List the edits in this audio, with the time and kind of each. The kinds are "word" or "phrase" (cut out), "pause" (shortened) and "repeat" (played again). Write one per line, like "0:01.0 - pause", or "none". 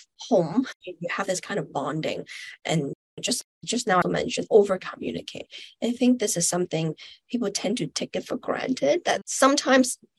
0:04.0 - phrase